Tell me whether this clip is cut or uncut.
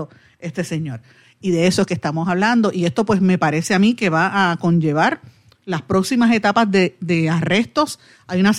uncut